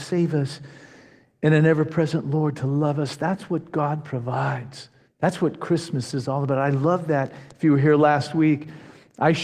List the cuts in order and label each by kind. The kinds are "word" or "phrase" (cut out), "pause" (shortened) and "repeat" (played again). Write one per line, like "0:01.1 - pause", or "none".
0:05.1 - pause